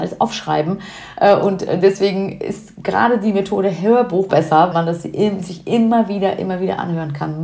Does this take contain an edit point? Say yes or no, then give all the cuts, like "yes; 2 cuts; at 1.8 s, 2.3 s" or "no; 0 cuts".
yes; 2 cuts; at 4.3 s, 4.7 s